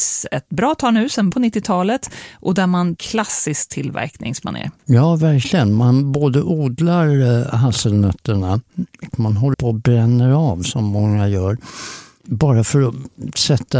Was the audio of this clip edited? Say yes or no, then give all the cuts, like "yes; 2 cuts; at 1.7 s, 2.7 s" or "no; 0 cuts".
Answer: yes; 5 cuts; at 1.3 s, 3.0 s, 4.8 s, 9.1 s, 9.5 s